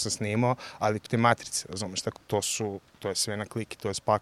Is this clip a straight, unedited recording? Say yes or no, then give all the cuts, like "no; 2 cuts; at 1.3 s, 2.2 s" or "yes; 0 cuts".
no; 2 cuts; at 1.1 s, 2.2 s